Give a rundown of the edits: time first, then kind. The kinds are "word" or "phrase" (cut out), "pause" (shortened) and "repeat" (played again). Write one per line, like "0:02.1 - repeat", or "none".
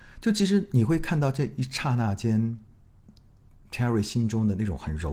none